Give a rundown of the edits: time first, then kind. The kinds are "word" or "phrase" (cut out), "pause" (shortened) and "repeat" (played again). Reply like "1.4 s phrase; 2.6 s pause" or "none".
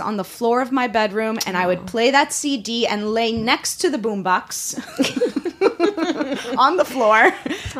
none